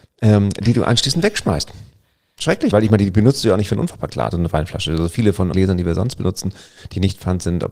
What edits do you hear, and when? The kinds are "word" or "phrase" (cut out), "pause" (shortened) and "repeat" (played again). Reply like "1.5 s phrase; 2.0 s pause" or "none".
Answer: 2.7 s word; 4.3 s word; 5.5 s word